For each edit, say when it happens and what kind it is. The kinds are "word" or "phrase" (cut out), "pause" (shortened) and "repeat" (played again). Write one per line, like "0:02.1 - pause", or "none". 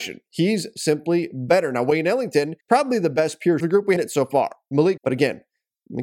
0:02.6 - pause
0:03.6 - phrase
0:04.0 - phrase
0:05.0 - word